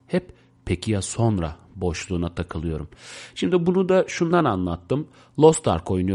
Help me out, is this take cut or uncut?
uncut